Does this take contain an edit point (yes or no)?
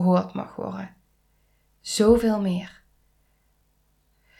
no